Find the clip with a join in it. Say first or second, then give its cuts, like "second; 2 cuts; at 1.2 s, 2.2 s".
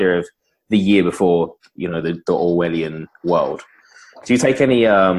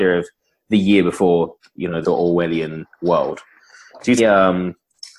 second; 2 cuts; at 2.0 s, 4.2 s